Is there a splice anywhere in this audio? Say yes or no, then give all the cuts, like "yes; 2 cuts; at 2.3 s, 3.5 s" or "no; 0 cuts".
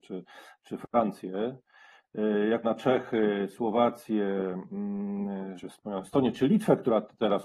yes; 2 cuts; at 2.6 s, 5.6 s